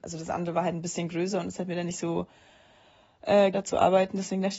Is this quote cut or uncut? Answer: cut